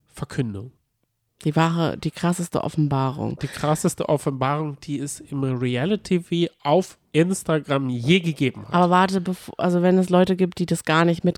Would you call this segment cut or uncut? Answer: uncut